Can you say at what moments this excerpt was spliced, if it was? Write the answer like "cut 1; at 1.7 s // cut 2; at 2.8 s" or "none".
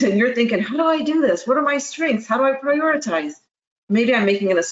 none